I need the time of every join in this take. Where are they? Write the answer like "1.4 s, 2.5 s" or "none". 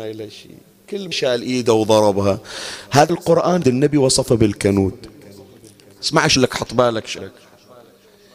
1.1 s, 3.1 s, 3.6 s, 6.4 s, 7.2 s